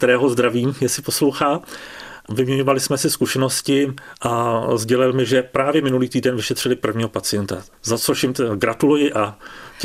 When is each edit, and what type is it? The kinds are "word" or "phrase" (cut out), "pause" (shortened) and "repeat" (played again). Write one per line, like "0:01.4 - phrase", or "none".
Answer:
0:07.7 - pause